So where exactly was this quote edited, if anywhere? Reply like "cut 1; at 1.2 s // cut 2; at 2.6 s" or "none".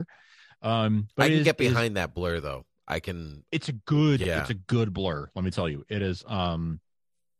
none